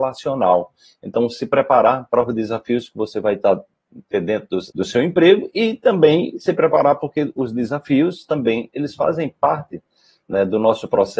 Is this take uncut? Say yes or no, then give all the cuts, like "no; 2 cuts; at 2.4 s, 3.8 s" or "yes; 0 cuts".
no; 1 cut; at 4.7 s